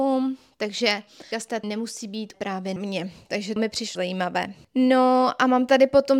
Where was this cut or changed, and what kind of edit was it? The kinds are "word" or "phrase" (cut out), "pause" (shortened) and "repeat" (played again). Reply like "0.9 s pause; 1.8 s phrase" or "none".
1.3 s word; 1.6 s word; 2.3 s word; 2.8 s word; 3.6 s word; 3.9 s word